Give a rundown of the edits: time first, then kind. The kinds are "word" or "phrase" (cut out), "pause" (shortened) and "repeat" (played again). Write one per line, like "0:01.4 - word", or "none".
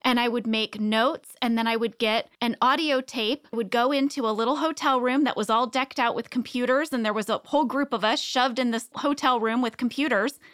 0:02.3 - pause
0:03.5 - phrase
0:08.9 - word